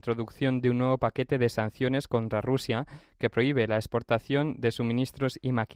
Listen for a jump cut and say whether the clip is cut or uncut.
uncut